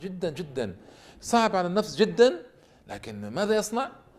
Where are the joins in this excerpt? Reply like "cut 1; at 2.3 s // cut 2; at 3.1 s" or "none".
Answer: none

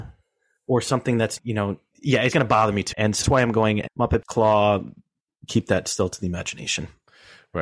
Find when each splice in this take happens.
cut 1; at 1.4 s // cut 2; at 1.9 s // cut 3; at 2.3 s // cut 4; at 2.9 s // cut 5; at 3.2 s // cut 6; at 3.9 s // cut 7; at 4.2 s

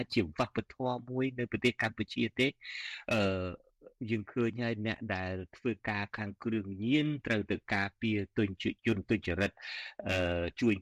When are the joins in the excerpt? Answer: cut 1; at 8.8 s

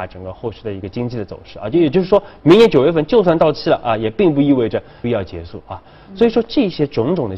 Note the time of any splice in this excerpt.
cut 1; at 5.0 s

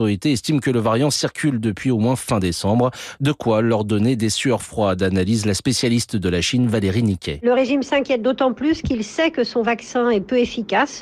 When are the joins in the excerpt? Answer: none

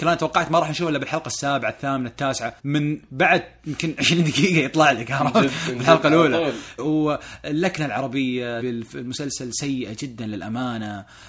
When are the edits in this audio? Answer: cut 1; at 2.6 s // cut 2; at 6.8 s // cut 3; at 8.6 s

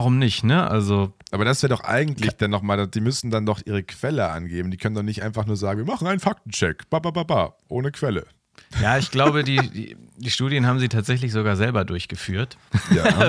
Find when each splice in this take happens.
none

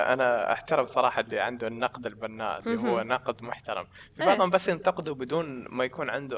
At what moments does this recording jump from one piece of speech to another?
none

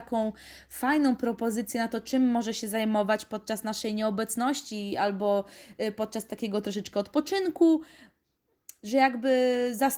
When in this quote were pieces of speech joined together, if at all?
none

